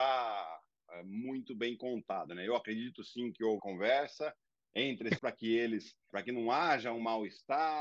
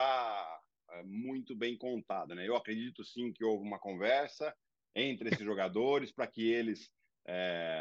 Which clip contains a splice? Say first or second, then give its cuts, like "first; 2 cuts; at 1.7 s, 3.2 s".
first; 3 cuts; at 3.6 s, 5.2 s, 6.1 s